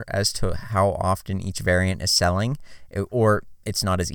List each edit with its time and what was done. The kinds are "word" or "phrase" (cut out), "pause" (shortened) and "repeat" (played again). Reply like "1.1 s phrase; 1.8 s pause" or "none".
none

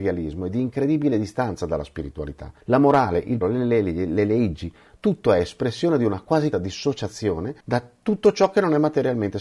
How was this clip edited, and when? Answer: 2.6 s pause; 3.4 s word; 6.5 s word; 7.6 s pause

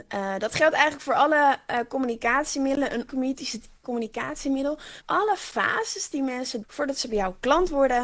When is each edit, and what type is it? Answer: 3.1 s word; 3.8 s word; 5.0 s word; 6.6 s word

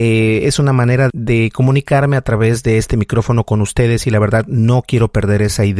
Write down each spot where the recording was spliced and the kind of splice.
1.1 s word

